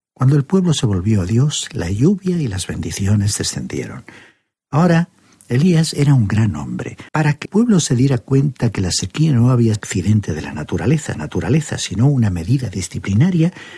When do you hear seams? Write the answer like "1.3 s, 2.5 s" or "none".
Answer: 7.1 s, 7.5 s, 9.8 s, 11.1 s